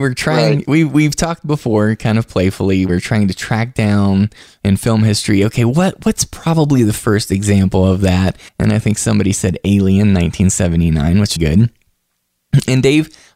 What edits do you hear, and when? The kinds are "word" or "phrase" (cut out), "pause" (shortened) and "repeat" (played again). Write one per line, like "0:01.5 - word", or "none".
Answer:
0:02.9 - phrase
0:08.5 - pause
0:11.4 - phrase